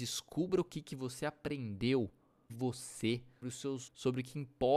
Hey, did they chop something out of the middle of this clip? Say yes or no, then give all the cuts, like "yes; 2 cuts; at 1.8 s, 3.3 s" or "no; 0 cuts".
yes; 3 cuts; at 2.5 s, 3.4 s, 3.9 s